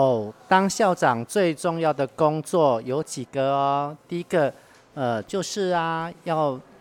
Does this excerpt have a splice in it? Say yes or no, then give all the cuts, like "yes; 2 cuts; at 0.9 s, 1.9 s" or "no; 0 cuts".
no; 0 cuts